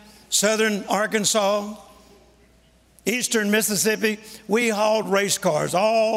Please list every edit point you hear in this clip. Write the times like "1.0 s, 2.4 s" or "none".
none